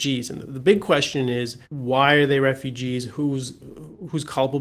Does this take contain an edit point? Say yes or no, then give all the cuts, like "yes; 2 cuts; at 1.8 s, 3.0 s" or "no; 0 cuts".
yes; 1 cut; at 1.6 s